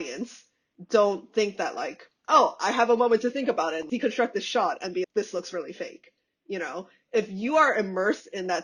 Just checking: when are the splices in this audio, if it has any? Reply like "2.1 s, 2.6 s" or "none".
5.0 s